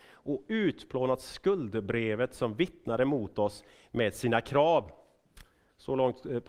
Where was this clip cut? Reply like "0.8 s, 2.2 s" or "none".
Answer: none